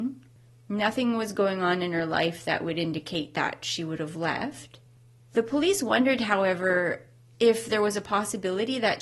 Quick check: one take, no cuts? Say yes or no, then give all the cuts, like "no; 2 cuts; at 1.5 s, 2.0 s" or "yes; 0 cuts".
yes; 0 cuts